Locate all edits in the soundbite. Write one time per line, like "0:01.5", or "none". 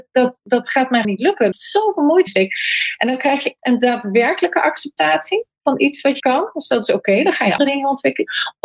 0:01.0
0:01.5
0:02.3
0:03.6
0:06.2
0:07.6